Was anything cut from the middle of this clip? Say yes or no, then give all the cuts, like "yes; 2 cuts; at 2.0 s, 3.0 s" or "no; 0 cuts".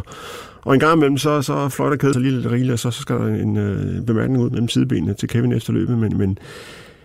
yes; 2 cuts; at 2.1 s, 4.5 s